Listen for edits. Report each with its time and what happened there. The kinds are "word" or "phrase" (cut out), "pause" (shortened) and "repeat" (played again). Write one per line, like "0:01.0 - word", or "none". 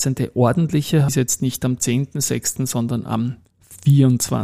0:01.1 - phrase